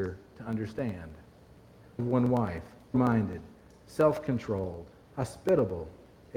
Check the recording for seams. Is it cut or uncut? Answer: cut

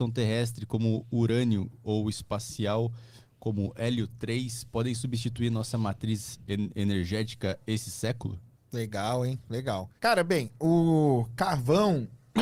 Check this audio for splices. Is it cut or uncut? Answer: cut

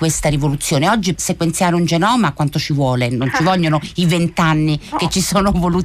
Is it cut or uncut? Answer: cut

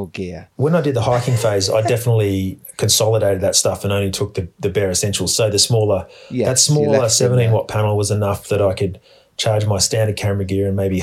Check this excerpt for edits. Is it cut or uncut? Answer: uncut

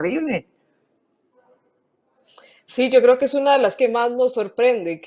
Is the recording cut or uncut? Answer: cut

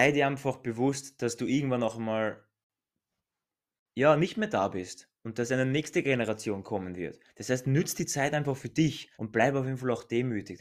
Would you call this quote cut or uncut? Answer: cut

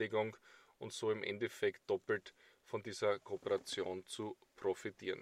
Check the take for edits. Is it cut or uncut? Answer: uncut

